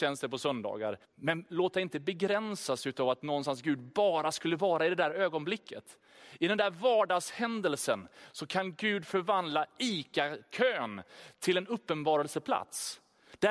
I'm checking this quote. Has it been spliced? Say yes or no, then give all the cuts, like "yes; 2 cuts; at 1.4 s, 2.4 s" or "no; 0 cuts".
yes; 1 cut; at 1.0 s